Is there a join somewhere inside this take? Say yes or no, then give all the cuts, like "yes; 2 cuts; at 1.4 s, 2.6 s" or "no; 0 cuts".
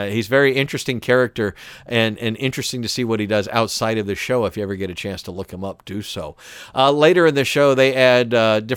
no; 0 cuts